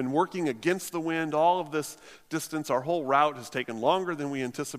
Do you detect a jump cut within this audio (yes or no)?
no